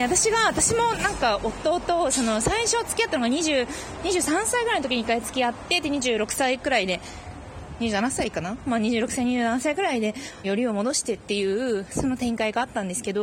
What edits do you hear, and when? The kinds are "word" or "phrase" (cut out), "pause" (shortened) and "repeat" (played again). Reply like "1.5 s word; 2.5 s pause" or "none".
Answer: 10.4 s phrase